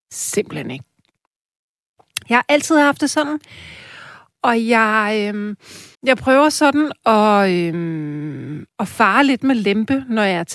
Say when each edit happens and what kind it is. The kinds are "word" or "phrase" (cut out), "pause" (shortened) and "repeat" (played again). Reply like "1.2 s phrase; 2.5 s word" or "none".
5.9 s pause; 8.7 s pause